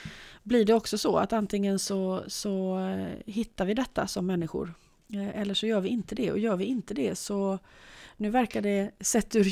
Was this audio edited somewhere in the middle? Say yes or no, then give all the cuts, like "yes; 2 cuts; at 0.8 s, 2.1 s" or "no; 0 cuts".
no; 0 cuts